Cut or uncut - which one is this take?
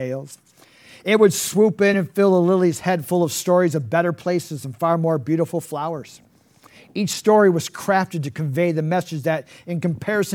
uncut